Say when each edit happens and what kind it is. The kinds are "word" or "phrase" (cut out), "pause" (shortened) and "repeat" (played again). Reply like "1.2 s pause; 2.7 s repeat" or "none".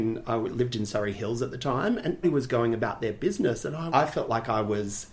2.2 s word; 3.9 s word